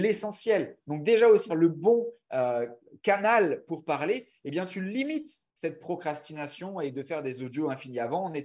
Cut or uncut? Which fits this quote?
cut